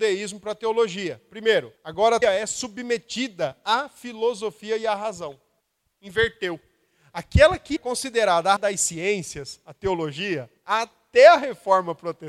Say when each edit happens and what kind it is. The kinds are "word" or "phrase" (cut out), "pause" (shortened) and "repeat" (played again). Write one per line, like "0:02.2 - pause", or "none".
0:01.8 - pause
0:02.2 - word
0:05.6 - pause
0:07.8 - word
0:08.6 - word
0:10.6 - pause